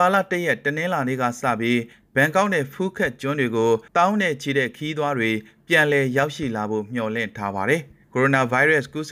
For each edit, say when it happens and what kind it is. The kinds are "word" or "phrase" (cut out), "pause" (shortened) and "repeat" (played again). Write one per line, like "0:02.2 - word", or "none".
0:03.9 - pause
0:08.0 - pause

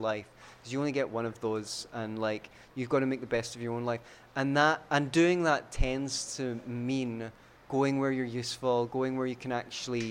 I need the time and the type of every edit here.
none

